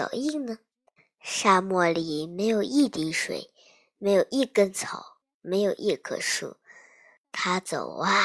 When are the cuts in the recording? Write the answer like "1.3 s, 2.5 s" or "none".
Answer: none